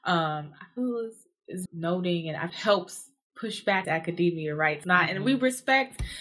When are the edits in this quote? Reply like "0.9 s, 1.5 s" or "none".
1.7 s, 2.5 s, 3.8 s, 4.8 s

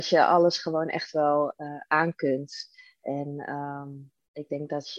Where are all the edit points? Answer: none

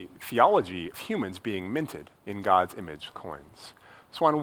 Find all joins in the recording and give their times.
0.9 s, 2.2 s, 3.1 s

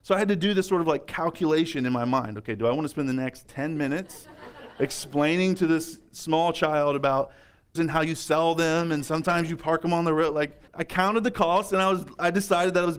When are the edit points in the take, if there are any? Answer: 7.8 s, 10.7 s

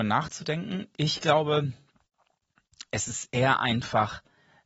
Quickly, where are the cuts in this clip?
none

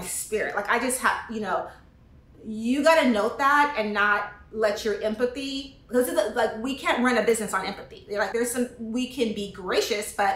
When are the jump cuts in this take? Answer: 8.3 s

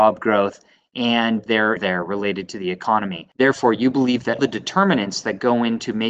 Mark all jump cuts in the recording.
1.8 s, 4.4 s

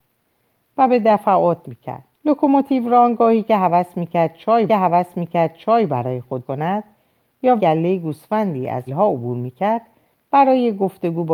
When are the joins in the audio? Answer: 1.6 s, 2.1 s, 4.7 s, 6.4 s, 7.6 s, 8.9 s

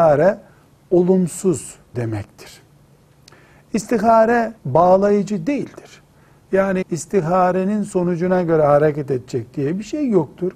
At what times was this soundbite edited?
1.9 s, 4.6 s, 6.8 s

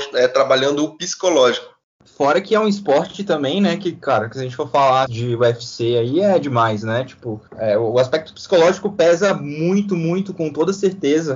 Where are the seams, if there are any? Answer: 2.0 s, 5.1 s, 7.5 s

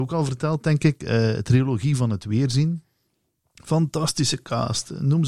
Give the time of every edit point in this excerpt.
none

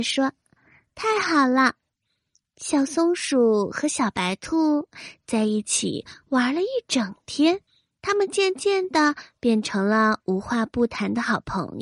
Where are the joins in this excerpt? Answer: 1.9 s, 7.7 s

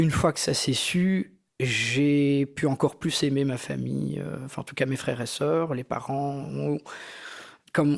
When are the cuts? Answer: 1.5 s

